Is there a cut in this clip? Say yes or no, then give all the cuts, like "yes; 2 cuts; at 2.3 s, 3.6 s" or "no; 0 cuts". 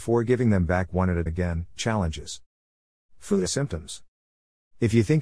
yes; 3 cuts; at 1.3 s, 1.8 s, 3.5 s